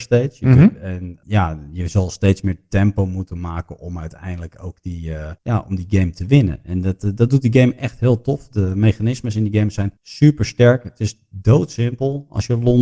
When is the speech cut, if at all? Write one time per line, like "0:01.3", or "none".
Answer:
0:05.4
0:10.0